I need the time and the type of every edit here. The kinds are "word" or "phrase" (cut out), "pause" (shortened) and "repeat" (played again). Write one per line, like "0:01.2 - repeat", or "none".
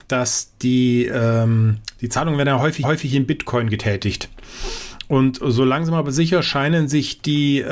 0:02.8 - repeat